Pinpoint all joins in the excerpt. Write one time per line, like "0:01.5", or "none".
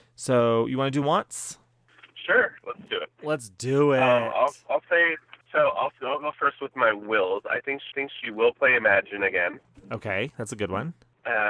0:01.0
0:05.4
0:07.9